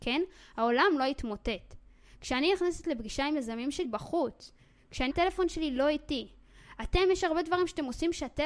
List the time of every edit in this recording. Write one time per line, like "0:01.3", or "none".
0:03.8
0:05.1